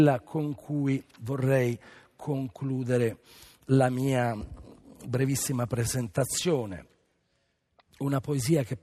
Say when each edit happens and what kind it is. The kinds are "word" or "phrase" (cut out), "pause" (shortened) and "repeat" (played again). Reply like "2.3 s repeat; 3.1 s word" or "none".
none